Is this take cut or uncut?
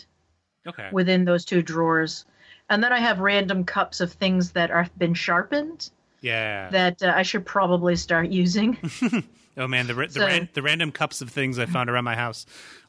uncut